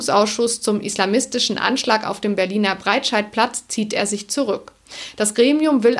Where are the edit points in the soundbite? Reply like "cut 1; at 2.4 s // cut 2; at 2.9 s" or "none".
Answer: none